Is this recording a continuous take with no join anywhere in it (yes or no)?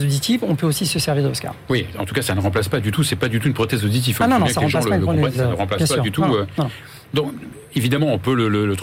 yes